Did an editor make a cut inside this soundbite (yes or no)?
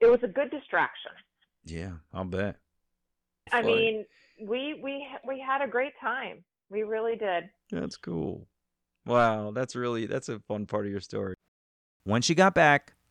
no